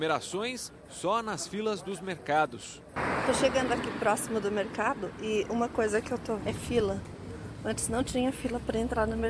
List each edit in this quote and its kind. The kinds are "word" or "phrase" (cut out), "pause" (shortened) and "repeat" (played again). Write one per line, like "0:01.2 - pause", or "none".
0:06.4 - word